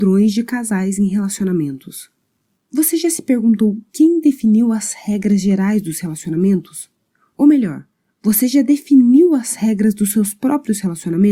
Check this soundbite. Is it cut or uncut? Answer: uncut